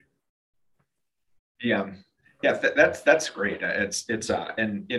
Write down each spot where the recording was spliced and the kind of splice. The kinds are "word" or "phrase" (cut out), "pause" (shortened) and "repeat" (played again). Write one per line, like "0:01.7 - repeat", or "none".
none